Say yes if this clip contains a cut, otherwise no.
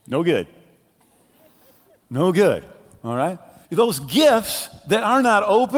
yes